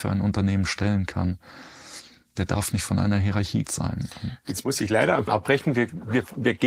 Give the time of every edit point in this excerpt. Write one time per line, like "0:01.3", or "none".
0:03.6
0:05.3